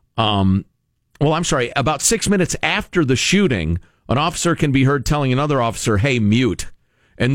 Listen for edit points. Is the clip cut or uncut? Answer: uncut